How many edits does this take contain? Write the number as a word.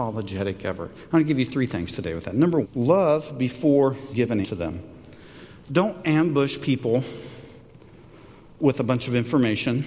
three